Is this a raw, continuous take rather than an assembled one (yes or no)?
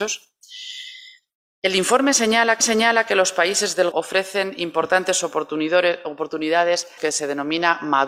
no